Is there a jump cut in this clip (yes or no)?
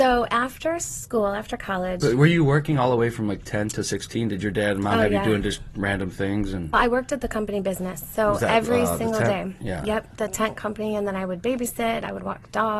yes